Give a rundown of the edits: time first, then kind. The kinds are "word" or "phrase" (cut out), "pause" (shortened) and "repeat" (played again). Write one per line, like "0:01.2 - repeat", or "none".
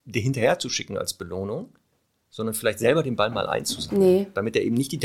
none